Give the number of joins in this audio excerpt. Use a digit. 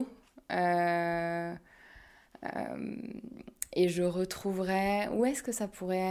0